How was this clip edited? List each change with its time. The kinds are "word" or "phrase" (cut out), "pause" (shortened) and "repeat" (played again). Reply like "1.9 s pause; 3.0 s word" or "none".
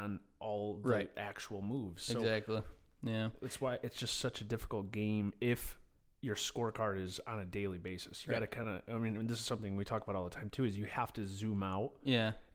none